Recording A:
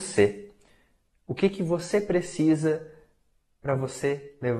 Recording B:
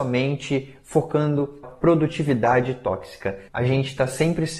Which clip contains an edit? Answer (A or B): B